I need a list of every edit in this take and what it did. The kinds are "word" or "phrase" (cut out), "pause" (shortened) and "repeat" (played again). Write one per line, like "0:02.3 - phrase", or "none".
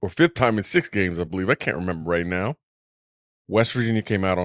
none